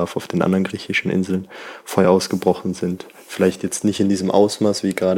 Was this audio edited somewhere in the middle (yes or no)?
no